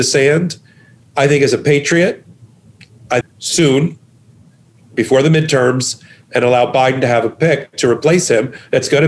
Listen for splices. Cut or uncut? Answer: cut